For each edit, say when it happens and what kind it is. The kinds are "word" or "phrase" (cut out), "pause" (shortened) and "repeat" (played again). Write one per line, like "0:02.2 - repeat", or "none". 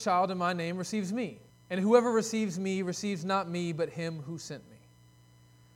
0:01.5 - pause